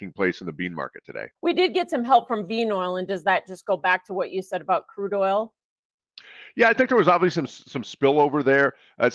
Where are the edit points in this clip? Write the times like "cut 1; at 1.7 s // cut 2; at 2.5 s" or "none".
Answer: cut 1; at 1.4 s